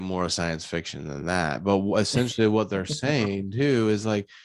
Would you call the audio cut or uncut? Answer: uncut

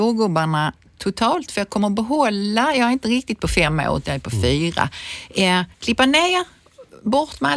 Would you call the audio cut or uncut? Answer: cut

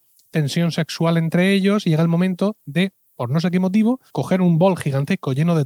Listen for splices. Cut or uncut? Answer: cut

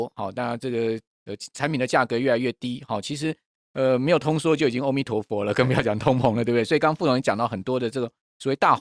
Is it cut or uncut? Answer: uncut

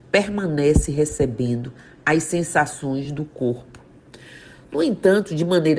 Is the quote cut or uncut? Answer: uncut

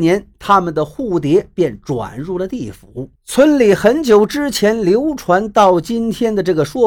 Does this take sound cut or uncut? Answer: cut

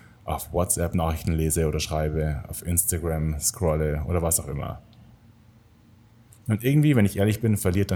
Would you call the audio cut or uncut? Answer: uncut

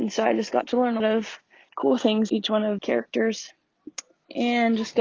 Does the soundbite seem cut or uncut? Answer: cut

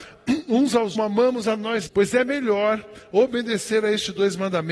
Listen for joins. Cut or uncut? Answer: cut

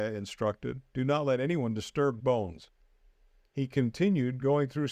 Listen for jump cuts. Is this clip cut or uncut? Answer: cut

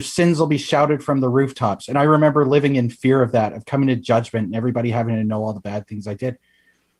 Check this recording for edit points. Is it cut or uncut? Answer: uncut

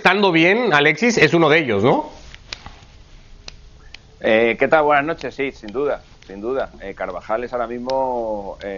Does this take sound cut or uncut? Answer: uncut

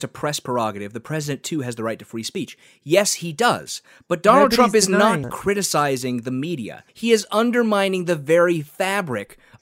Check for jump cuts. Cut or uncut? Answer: cut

